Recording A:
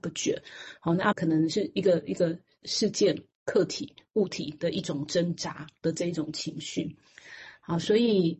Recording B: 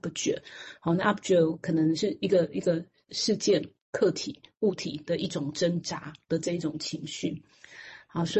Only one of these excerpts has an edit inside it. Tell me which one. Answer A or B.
A